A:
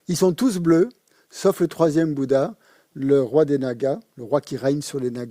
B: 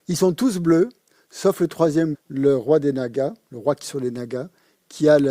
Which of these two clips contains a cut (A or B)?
B